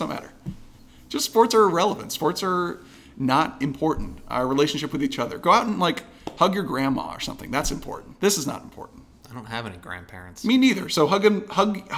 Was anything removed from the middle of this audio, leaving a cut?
no; 0 cuts

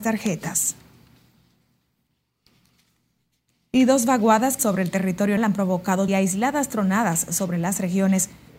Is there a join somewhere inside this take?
yes; 3 cuts; at 4.6 s, 5.4 s, 6.1 s

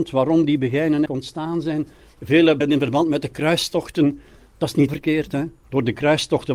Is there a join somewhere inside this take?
yes; 3 cuts; at 1.1 s, 2.6 s, 4.9 s

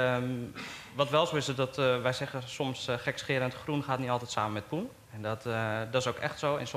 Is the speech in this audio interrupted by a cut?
no; 0 cuts

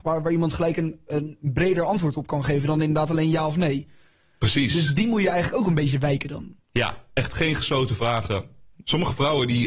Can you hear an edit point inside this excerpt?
no; 0 cuts

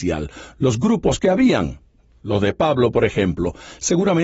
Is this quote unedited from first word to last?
yes; 0 cuts

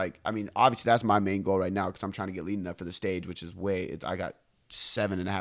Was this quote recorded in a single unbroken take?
yes; 0 cuts

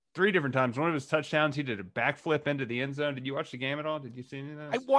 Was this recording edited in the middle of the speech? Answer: no; 0 cuts

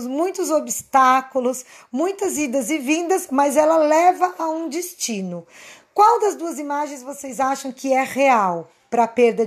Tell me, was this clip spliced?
no; 0 cuts

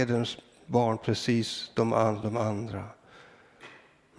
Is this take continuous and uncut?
no; 1 cut; at 2.2 s

